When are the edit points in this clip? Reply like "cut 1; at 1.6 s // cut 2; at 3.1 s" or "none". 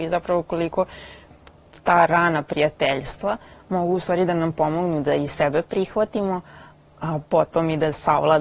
cut 1; at 7.2 s